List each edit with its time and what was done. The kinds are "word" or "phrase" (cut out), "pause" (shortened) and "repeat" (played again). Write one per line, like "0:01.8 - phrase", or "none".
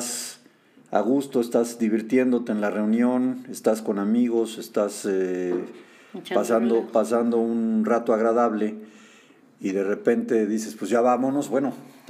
none